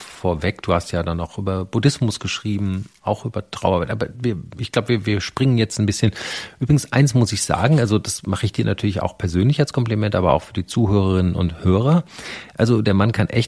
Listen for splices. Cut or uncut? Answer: uncut